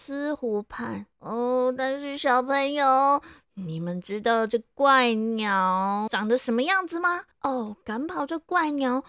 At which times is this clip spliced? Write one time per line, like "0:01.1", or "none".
0:01.1
0:06.1
0:07.3